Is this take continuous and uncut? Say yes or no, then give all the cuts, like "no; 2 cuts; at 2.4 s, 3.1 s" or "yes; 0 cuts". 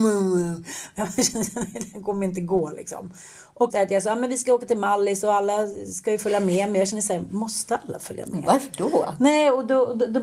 no; 1 cut; at 3.7 s